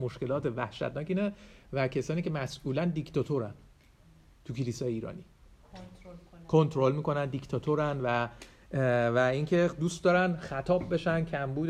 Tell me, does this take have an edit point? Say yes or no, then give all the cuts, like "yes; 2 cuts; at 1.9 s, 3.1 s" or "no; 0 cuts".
no; 0 cuts